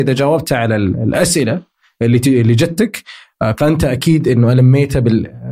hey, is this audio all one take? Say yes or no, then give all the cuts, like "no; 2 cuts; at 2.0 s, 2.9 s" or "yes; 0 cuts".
yes; 0 cuts